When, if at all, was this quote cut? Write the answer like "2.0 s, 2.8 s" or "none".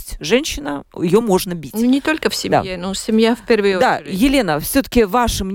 none